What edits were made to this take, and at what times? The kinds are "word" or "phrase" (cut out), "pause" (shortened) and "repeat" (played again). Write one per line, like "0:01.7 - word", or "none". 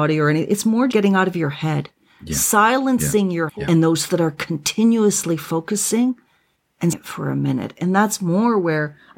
0:00.9 - word
0:03.5 - word
0:04.1 - word
0:06.9 - word